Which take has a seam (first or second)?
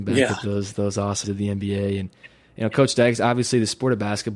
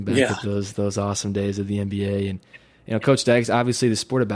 first